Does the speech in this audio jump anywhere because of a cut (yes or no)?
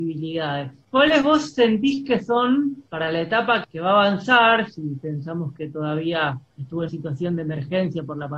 yes